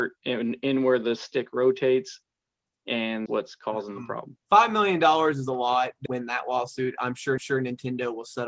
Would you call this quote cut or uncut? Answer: cut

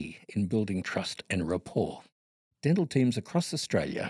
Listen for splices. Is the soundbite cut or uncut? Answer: uncut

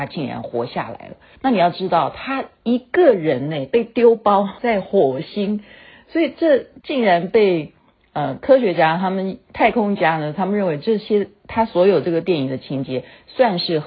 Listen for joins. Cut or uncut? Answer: cut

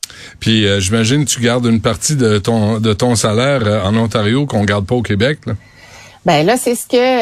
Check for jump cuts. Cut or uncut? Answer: uncut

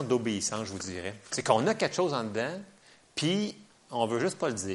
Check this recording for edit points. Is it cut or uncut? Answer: uncut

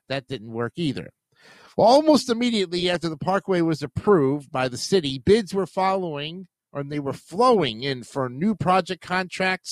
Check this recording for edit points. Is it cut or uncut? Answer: uncut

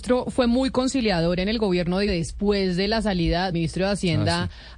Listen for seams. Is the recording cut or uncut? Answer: cut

